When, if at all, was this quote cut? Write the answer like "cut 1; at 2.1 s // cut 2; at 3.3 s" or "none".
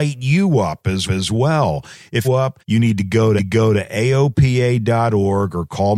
cut 1; at 1.1 s // cut 2; at 2.2 s // cut 3; at 2.6 s // cut 4; at 3.4 s